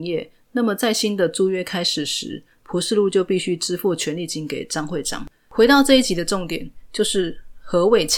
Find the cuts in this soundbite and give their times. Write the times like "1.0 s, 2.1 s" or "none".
5.3 s